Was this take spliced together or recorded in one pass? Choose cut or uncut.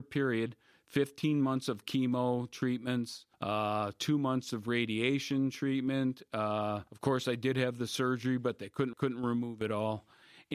cut